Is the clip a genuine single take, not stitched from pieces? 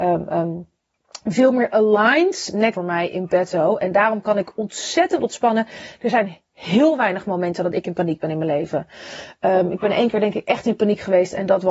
no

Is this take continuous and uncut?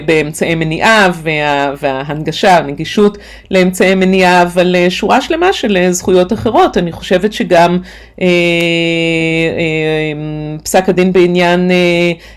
yes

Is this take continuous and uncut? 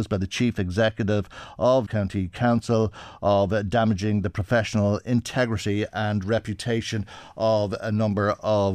no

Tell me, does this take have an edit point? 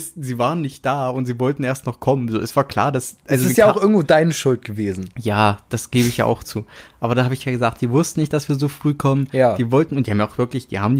no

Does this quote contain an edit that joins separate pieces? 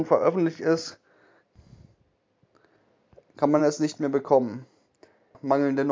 no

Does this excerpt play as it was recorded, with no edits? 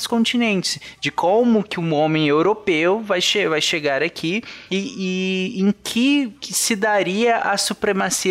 yes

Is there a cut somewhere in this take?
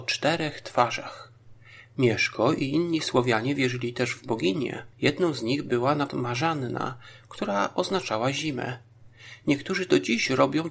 yes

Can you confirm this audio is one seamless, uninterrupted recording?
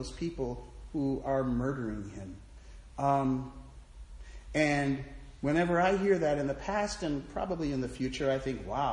yes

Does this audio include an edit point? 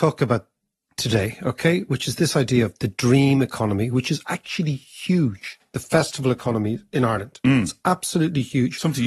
no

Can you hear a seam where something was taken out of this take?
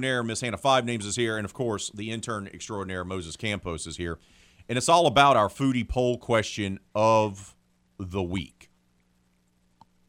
no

